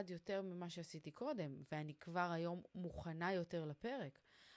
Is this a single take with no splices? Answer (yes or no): yes